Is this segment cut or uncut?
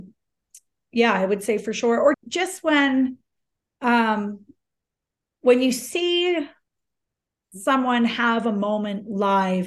cut